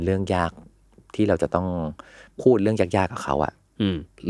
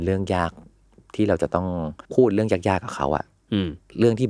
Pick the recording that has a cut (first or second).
second